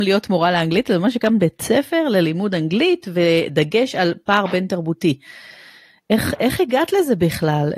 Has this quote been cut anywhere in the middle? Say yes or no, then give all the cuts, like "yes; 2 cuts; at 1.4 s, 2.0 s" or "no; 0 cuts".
no; 0 cuts